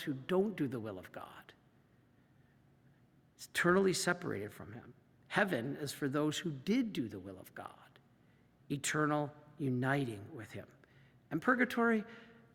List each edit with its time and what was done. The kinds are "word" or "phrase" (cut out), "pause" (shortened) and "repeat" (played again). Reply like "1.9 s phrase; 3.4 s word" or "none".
none